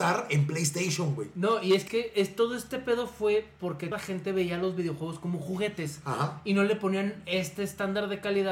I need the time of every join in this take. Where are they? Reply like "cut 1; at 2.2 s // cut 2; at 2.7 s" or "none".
cut 1; at 1.9 s // cut 2; at 3.9 s